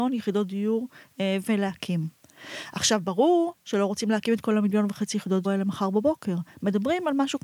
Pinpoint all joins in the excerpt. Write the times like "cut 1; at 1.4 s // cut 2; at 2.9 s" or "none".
cut 1; at 5.4 s